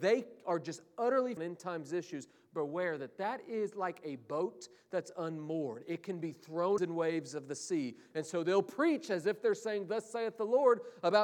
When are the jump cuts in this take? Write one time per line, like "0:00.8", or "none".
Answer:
0:01.4
0:06.8